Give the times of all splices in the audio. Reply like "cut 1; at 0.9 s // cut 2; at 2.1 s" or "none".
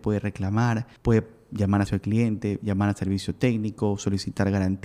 cut 1; at 1.0 s // cut 2; at 1.9 s